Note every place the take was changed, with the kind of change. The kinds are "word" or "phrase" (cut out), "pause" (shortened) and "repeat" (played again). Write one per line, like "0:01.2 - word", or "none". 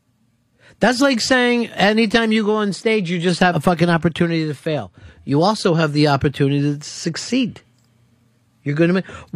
0:03.5 - word